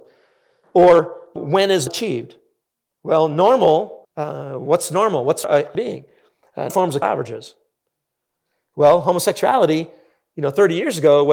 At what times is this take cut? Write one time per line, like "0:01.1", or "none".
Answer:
0:01.4
0:01.9
0:04.0
0:05.4
0:05.7
0:06.7
0:07.0